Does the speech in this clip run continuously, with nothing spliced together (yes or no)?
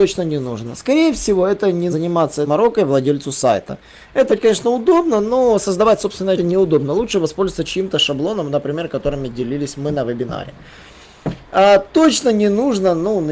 no